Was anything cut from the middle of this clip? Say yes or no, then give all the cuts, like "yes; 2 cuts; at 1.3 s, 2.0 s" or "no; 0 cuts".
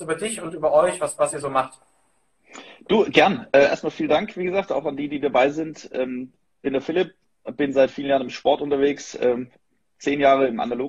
no; 0 cuts